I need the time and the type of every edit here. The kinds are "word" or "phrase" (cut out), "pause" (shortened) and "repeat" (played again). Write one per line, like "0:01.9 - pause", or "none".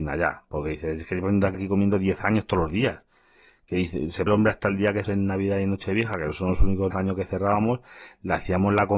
0:01.5 - word
0:04.3 - word
0:05.0 - word
0:06.9 - word